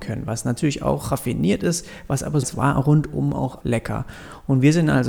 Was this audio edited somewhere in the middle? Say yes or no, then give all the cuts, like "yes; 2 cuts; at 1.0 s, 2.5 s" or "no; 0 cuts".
yes; 2 cuts; at 2.4 s, 3.6 s